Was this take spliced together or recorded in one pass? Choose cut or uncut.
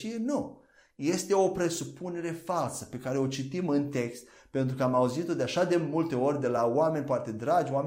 uncut